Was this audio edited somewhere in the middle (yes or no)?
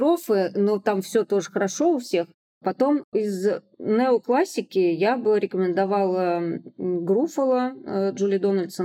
no